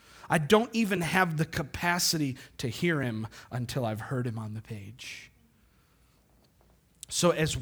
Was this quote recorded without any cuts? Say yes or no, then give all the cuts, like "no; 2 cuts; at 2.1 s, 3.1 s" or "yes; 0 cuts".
yes; 0 cuts